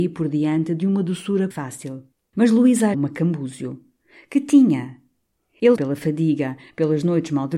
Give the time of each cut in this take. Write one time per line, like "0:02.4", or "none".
0:01.5
0:02.1
0:02.9
0:05.8